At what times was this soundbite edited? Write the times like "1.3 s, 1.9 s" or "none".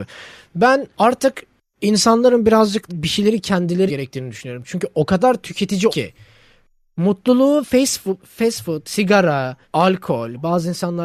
0.9 s, 2.9 s, 3.9 s, 5.9 s, 8.9 s, 9.6 s